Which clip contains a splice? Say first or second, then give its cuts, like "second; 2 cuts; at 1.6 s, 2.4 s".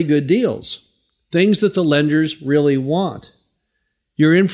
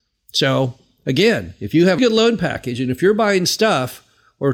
second; 1 cut; at 2.0 s